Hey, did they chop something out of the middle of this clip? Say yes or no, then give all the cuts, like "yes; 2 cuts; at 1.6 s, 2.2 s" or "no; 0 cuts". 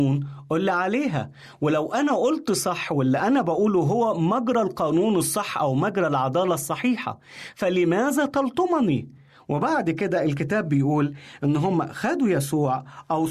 no; 0 cuts